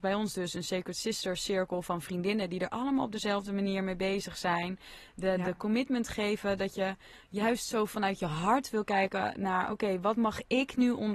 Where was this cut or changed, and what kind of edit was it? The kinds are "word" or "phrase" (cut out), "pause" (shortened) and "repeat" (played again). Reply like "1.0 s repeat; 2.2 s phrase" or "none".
none

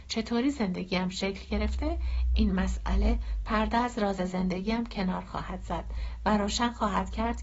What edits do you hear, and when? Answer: none

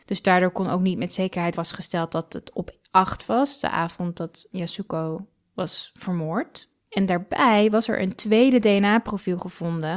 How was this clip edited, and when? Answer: 1.5 s word; 3.2 s word; 4.5 s word; 6.8 s pause

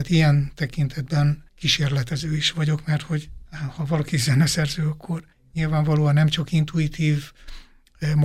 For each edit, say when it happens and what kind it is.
1.5 s pause; 5.3 s pause

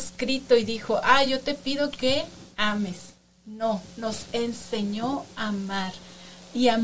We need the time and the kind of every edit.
none

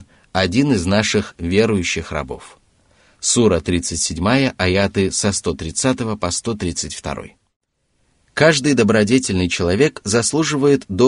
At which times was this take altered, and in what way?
none

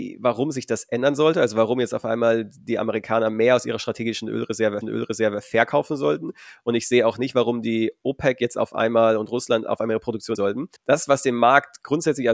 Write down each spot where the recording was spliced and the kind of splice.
4.8 s repeat; 10.3 s word; 10.8 s pause

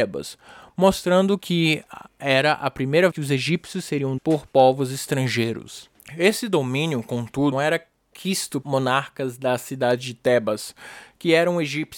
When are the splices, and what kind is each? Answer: 3.1 s word; 4.2 s word; 7.5 s word; 8.6 s word

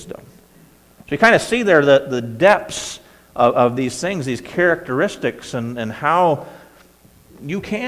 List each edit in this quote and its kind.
none

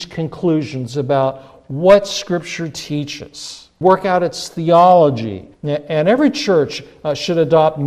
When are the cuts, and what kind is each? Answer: 3.8 s word; 5.5 s pause

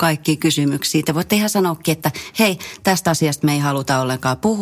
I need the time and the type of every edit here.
none

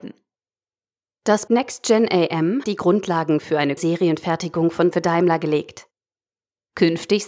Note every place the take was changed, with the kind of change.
1.5 s word; 2.6 s word; 3.8 s word; 4.9 s word

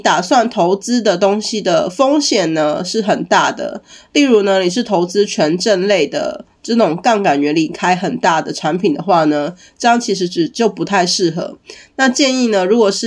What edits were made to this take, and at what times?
none

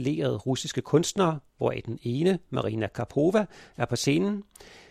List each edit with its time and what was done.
1.5 s pause

